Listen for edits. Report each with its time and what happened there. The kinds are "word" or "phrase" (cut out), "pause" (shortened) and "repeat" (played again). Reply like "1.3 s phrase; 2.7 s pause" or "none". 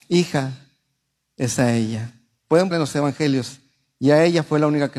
2.7 s word